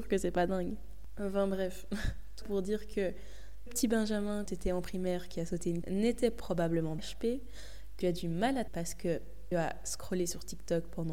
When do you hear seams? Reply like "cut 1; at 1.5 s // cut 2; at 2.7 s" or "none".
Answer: cut 1; at 2.4 s // cut 2; at 3.7 s // cut 3; at 4.5 s // cut 4; at 5.8 s // cut 5; at 7.0 s // cut 6; at 8.0 s // cut 7; at 8.7 s // cut 8; at 9.5 s